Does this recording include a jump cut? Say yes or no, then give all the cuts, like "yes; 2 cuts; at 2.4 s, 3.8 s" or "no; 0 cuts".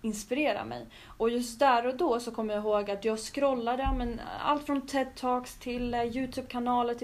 no; 0 cuts